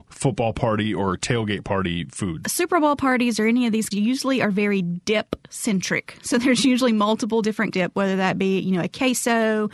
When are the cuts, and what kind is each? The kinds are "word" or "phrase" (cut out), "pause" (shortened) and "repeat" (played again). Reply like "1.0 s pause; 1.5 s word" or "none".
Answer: 3.9 s phrase; 7.7 s phrase